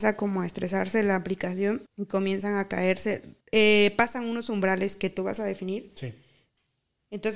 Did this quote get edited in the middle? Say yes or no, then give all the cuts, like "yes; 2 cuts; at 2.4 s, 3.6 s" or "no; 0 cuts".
yes; 2 cuts; at 1.9 s, 3.4 s